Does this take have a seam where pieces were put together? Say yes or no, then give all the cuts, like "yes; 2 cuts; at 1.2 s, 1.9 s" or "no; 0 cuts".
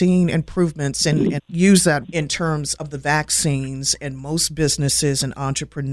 yes; 3 cuts; at 1.4 s, 2.0 s, 2.8 s